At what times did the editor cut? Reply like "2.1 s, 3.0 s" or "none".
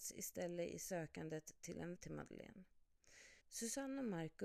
2.0 s, 3.4 s